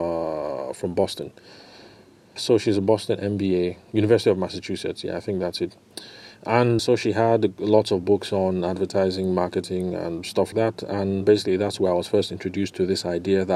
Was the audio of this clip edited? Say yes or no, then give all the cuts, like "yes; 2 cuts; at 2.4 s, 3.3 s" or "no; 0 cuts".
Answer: yes; 4 cuts; at 2.4 s, 6.8 s, 10.5 s, 11.2 s